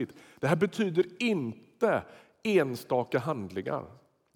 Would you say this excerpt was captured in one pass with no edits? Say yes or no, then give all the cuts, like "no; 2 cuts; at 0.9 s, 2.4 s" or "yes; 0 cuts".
yes; 0 cuts